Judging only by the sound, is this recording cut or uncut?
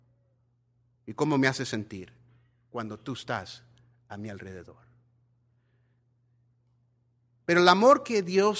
uncut